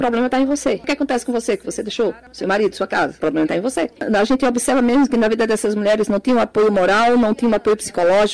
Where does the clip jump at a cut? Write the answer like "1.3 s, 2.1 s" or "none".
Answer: none